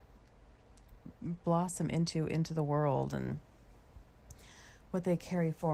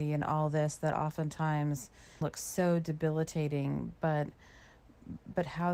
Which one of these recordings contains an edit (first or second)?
second